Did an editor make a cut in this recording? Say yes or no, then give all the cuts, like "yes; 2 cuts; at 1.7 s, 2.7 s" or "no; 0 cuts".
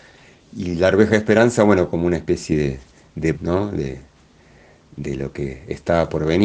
yes; 1 cut; at 3.3 s